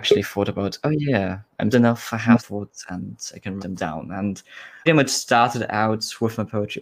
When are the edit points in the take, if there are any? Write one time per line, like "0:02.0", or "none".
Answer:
0:01.7
0:02.4
0:03.6
0:04.9